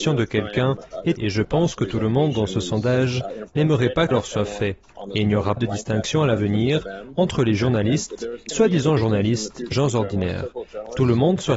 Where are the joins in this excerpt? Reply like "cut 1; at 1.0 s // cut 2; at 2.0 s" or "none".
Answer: cut 1; at 1.2 s // cut 2; at 4.1 s // cut 3; at 5.6 s // cut 4; at 8.5 s // cut 5; at 9.7 s